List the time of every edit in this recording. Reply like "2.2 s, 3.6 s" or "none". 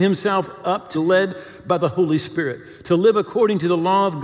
0.9 s